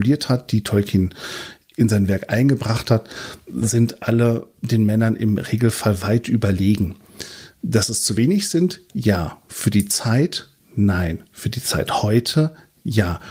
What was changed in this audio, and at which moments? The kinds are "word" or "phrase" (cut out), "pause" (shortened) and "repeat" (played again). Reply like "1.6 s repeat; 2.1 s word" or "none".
none